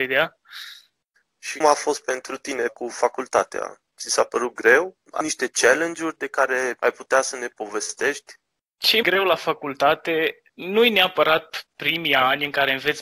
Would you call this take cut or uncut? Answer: cut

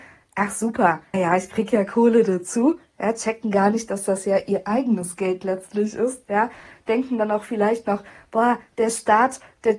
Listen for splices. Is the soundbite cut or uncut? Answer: cut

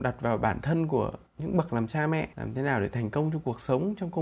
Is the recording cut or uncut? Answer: cut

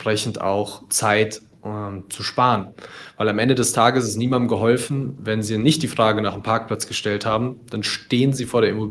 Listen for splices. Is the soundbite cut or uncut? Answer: uncut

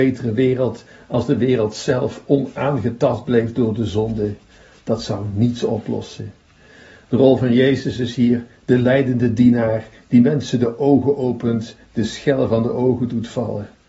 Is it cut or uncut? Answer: uncut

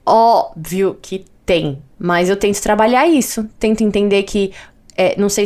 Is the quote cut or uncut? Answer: cut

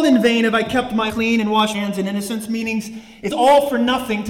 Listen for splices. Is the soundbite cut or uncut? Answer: cut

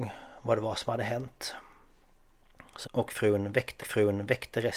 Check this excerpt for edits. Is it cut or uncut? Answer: cut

